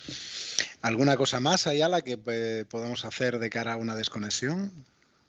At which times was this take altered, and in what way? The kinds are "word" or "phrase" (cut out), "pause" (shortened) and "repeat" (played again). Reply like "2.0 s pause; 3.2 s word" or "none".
none